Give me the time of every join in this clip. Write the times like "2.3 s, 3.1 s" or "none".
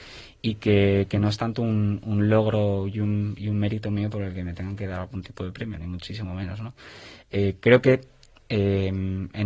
none